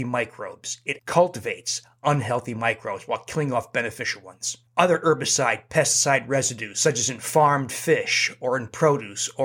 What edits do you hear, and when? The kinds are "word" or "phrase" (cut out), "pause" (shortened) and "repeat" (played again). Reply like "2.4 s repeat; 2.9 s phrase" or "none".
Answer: 1.0 s word; 4.7 s pause